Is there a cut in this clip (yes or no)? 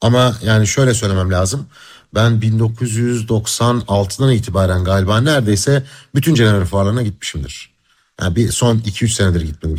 no